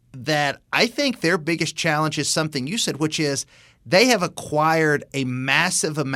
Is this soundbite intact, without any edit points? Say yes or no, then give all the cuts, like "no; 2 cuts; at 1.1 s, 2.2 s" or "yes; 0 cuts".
yes; 0 cuts